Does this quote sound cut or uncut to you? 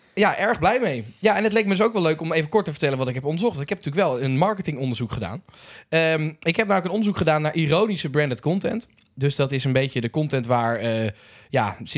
uncut